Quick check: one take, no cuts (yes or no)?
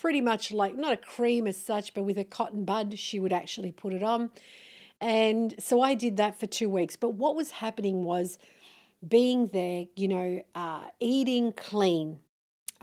yes